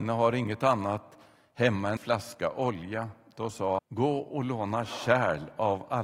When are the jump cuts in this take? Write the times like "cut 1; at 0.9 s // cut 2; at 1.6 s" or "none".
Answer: cut 1; at 2.0 s // cut 2; at 3.8 s